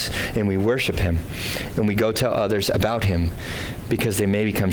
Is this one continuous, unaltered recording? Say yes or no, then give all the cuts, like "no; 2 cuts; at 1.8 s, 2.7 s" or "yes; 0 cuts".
yes; 0 cuts